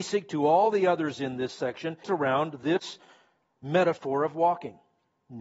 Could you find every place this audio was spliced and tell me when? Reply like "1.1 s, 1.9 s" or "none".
2.0 s